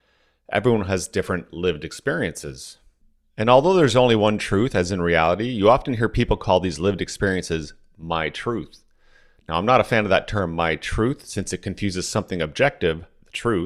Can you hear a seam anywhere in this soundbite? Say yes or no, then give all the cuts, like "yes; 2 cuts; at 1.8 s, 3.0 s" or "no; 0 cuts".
no; 0 cuts